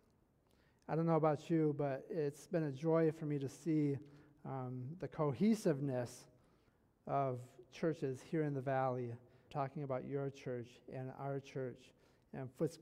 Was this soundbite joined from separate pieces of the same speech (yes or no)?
yes